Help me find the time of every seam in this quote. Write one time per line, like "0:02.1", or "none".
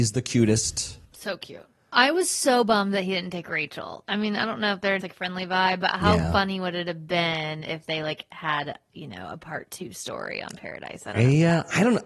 0:01.1
0:05.0